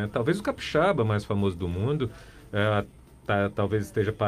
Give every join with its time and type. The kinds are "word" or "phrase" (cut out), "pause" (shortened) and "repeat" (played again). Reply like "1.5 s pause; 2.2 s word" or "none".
none